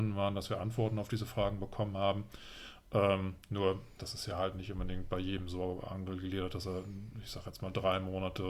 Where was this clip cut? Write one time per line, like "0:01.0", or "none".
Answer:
none